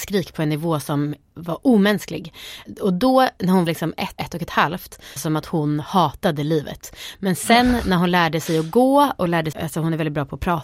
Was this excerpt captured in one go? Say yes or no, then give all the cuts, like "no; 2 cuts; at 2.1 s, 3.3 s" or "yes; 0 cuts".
no; 4 cuts; at 3.7 s, 4.2 s, 5.2 s, 9.5 s